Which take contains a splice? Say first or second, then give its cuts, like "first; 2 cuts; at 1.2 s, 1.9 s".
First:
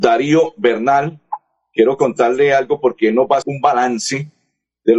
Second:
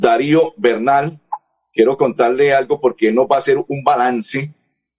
first; 1 cut; at 3.4 s